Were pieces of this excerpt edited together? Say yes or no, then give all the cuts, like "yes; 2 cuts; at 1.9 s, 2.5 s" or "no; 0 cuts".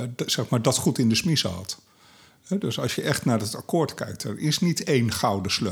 no; 0 cuts